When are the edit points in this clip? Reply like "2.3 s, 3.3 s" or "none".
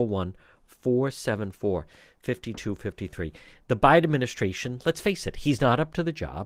none